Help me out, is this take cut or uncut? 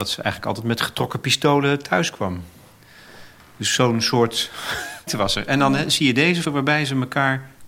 cut